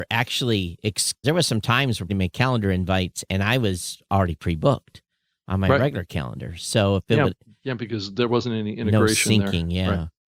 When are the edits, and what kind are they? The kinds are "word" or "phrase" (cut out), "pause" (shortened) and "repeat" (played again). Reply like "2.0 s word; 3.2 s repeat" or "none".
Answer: 1.2 s word; 2.1 s phrase